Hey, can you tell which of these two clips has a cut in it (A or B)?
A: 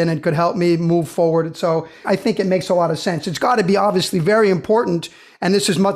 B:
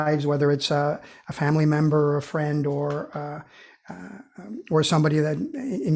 A